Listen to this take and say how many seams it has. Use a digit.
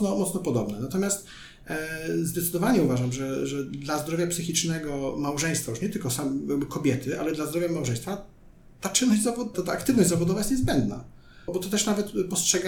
2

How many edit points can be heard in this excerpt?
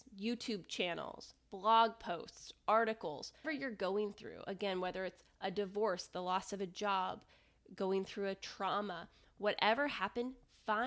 1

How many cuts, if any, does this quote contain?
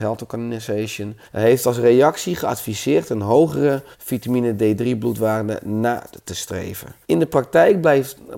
3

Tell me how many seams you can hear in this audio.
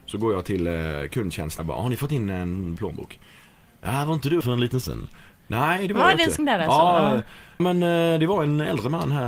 6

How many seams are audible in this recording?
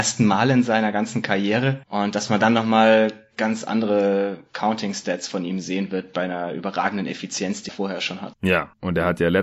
1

